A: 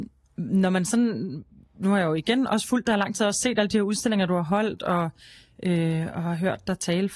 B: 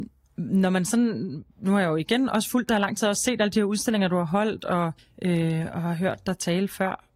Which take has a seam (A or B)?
B